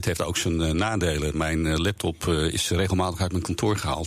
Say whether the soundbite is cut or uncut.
uncut